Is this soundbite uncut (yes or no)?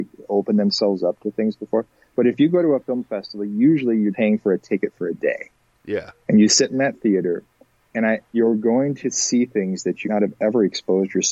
no